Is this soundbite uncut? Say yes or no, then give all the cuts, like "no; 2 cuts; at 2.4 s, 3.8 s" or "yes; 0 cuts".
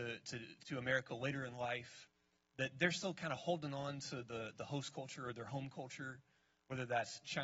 yes; 0 cuts